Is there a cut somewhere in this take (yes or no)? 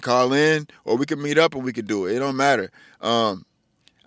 no